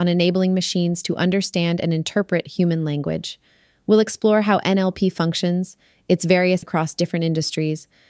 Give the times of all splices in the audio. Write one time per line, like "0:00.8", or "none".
0:06.6